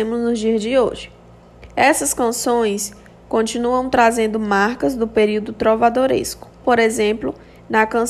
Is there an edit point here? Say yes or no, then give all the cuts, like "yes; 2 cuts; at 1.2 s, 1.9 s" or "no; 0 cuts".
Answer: yes; 1 cut; at 6.6 s